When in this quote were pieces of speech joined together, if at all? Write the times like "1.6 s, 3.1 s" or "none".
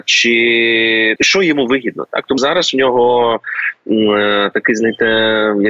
1.2 s, 2.4 s